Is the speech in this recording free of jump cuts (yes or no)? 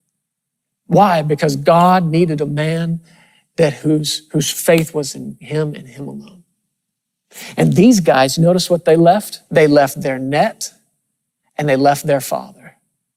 no